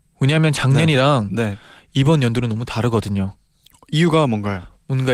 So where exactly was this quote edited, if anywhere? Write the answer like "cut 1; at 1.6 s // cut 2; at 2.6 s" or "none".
none